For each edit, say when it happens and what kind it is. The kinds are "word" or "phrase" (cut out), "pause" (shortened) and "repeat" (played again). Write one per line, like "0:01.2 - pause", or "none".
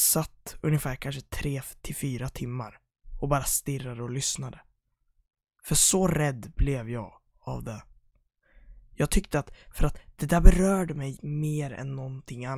0:11.2 - word